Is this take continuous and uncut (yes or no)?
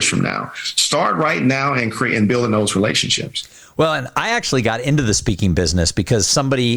yes